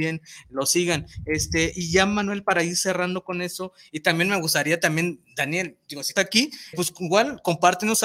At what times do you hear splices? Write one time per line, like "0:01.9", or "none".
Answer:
0:06.2
0:06.7